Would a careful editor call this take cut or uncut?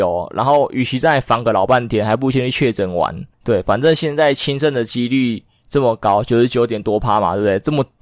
cut